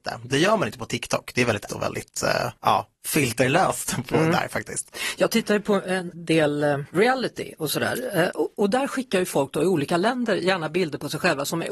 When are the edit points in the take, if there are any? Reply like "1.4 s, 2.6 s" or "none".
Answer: 1.7 s, 2.6 s